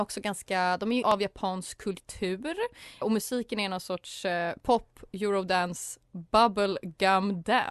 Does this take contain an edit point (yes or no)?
yes